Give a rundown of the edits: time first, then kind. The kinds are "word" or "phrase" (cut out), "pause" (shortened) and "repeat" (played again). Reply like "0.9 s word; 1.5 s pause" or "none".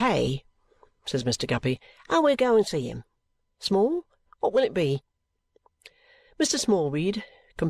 none